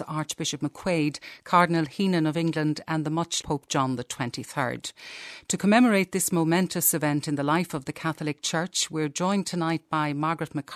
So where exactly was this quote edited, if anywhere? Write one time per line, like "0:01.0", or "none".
0:03.4